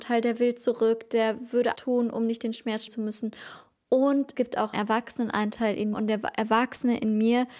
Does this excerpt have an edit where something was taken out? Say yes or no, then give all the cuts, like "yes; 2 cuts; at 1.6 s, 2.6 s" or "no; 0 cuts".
yes; 5 cuts; at 1.7 s, 2.9 s, 4.3 s, 4.7 s, 5.9 s